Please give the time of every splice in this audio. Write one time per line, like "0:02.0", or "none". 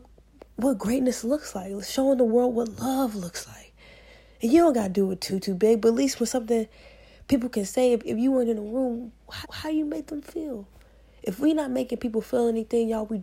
0:09.4